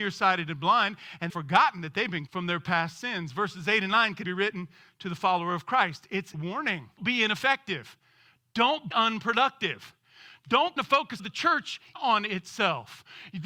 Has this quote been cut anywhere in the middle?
yes; 9 cuts; at 1.3 s, 2.3 s, 4.2 s, 6.3 s, 7.0 s, 8.9 s, 10.8 s, 11.2 s, 12.0 s

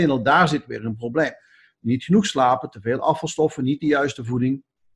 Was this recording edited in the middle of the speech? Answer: no; 0 cuts

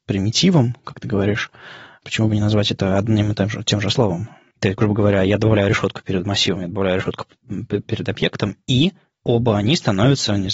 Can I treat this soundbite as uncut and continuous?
yes; 0 cuts

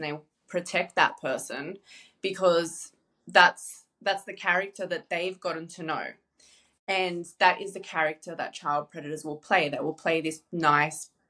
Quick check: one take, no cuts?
yes; 0 cuts

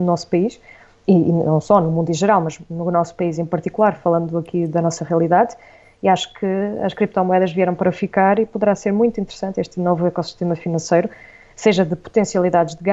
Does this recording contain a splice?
no; 0 cuts

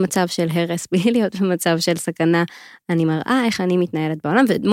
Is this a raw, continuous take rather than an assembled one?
yes; 0 cuts

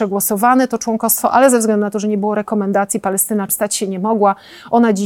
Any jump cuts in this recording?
yes; 1 cut; at 3.5 s

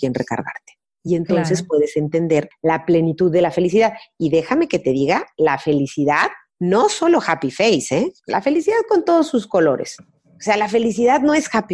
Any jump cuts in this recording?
no; 0 cuts

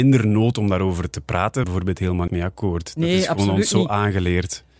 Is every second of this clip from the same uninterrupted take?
no; 2 cuts; at 1.6 s, 2.3 s

